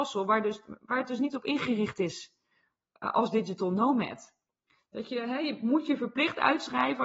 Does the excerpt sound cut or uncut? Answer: uncut